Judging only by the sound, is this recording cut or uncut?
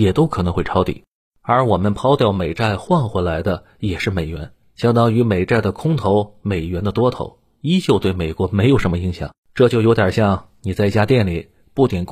cut